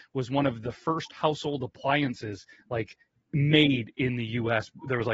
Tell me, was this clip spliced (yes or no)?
no